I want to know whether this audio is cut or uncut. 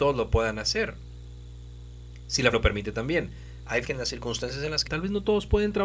cut